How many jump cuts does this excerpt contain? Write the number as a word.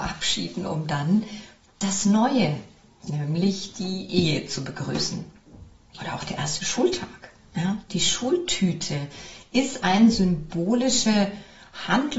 zero